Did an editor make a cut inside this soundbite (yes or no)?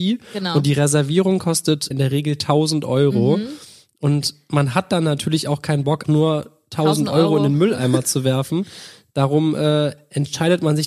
yes